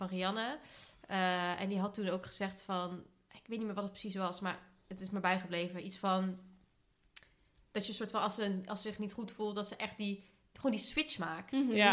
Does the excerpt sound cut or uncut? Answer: uncut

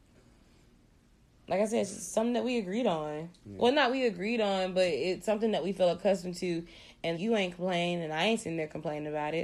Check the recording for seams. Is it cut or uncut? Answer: cut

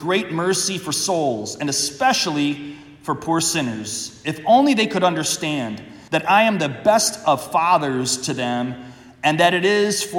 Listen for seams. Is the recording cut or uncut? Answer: cut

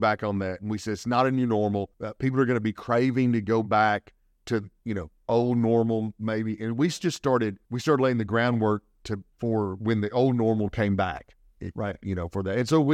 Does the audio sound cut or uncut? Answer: cut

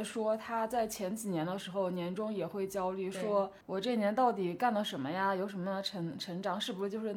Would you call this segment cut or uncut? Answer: cut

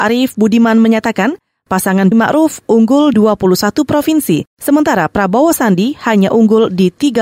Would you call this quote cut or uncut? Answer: cut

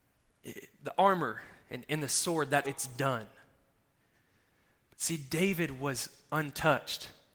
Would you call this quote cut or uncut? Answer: cut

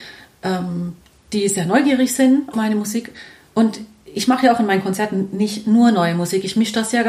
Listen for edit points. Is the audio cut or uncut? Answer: cut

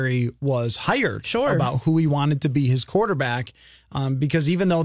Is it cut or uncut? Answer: uncut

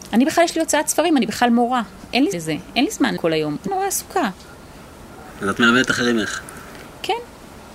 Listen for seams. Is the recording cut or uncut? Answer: cut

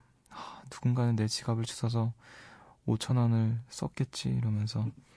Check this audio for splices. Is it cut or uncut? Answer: uncut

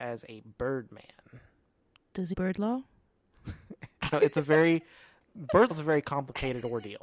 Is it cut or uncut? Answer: cut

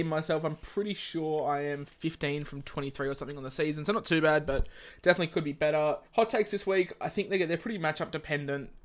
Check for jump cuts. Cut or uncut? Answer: cut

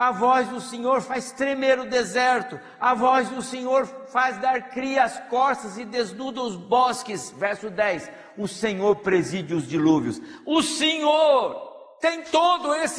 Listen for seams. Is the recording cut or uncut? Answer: uncut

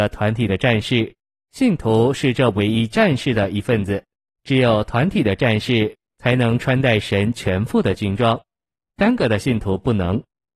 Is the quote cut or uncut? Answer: uncut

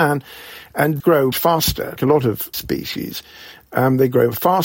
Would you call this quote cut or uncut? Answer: cut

